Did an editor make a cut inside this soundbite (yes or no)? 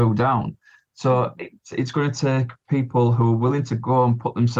no